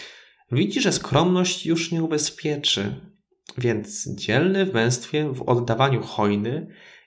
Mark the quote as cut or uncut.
uncut